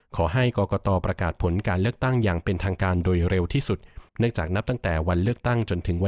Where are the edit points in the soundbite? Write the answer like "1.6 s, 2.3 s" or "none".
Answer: 4.1 s